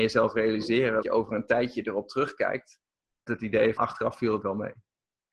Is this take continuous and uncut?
no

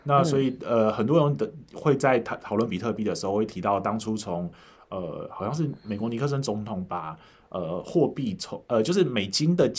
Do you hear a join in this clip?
no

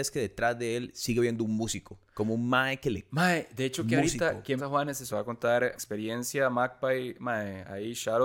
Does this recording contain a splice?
yes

